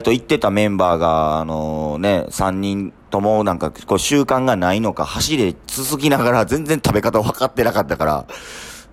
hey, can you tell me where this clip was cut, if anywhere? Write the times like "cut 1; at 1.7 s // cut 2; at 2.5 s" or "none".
none